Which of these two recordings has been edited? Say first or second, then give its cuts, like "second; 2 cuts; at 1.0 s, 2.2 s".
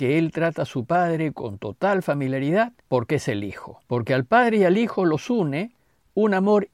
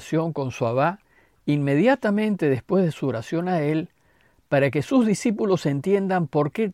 first; 2 cuts; at 2.8 s, 3.8 s